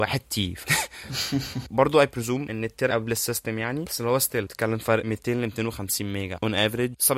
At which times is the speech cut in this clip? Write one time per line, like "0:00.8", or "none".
0:02.9